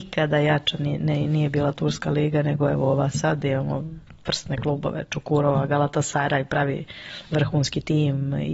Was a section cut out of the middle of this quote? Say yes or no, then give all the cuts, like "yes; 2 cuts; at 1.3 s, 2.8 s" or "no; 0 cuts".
no; 0 cuts